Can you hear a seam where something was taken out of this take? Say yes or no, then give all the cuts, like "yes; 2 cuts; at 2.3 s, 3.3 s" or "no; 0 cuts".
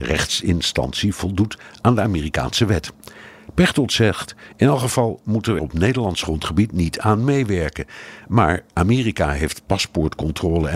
yes; 1 cut; at 5.6 s